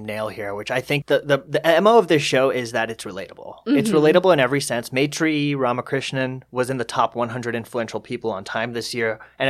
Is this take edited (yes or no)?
yes